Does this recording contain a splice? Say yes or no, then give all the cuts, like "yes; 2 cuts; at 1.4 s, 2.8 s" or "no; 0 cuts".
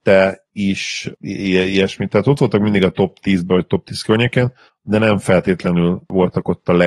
no; 0 cuts